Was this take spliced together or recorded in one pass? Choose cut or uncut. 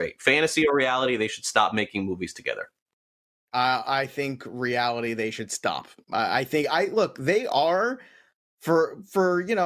uncut